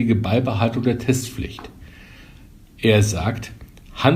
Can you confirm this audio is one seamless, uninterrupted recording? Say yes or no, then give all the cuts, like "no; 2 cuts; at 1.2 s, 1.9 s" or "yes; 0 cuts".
yes; 0 cuts